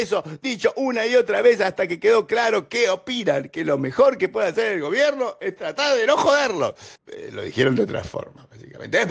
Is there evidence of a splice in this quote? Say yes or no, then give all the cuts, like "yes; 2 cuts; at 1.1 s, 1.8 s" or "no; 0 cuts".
yes; 1 cut; at 7.0 s